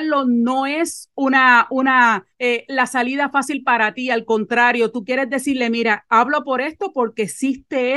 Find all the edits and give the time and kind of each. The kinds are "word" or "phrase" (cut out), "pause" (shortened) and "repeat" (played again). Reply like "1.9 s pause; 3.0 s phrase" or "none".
2.3 s pause

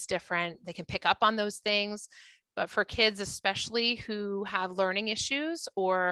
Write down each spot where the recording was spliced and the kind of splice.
none

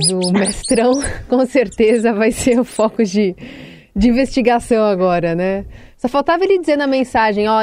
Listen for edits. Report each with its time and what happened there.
none

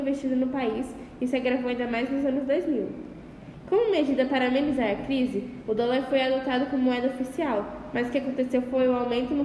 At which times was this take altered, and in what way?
none

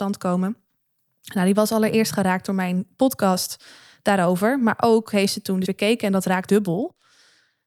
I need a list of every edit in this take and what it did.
5.6 s word; 6.5 s word

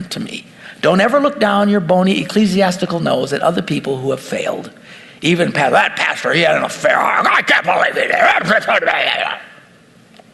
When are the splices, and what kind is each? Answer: none

